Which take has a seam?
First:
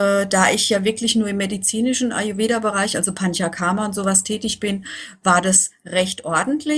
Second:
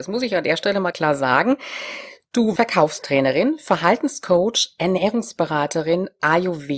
second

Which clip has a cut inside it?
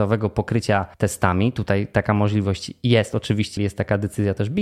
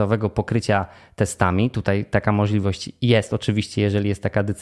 first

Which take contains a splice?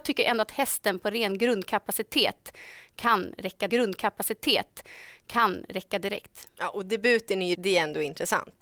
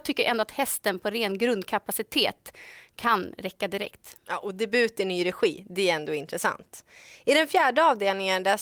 first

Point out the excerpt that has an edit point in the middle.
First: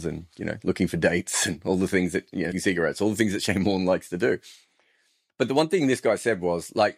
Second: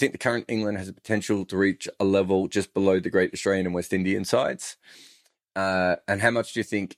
first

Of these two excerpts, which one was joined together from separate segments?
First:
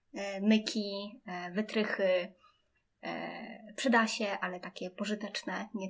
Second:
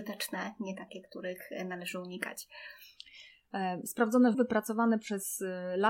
second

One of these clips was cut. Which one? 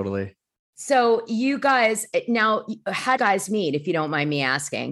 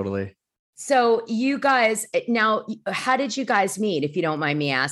first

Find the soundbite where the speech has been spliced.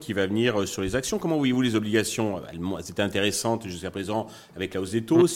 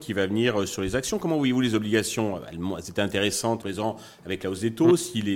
second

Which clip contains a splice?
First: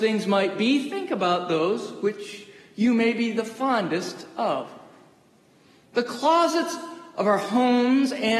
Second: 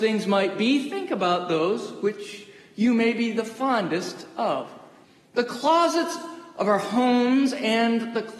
second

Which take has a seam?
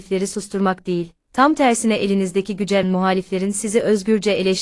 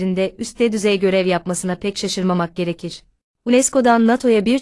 first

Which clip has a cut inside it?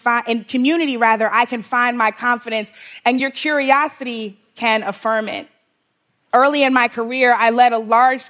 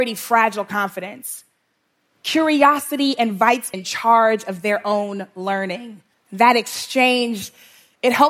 second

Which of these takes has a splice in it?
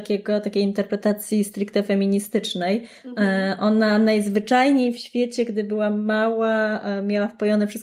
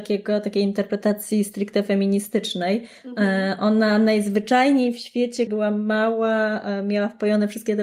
second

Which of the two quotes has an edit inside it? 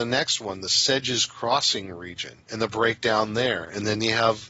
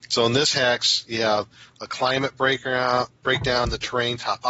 first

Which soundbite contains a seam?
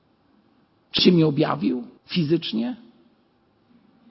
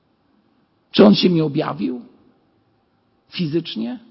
first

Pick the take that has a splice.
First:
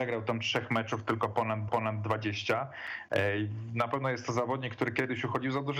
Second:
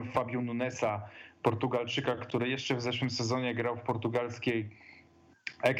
first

